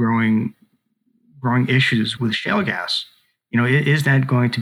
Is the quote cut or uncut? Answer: cut